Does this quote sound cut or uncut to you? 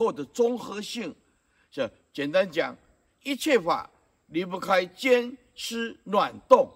uncut